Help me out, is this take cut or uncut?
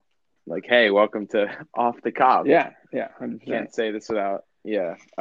uncut